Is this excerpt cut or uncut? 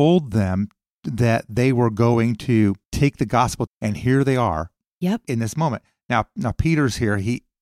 cut